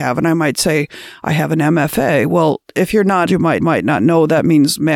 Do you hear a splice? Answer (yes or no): yes